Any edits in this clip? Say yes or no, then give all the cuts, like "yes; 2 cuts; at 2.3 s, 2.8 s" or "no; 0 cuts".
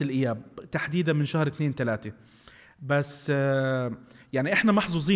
no; 0 cuts